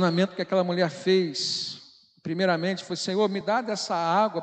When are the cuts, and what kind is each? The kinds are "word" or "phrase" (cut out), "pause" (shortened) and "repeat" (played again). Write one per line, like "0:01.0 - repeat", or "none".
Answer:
none